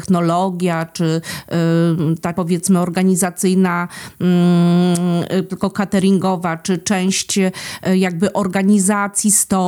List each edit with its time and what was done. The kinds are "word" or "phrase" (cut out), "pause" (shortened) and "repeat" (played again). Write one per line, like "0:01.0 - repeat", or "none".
0:02.3 - word
0:05.5 - phrase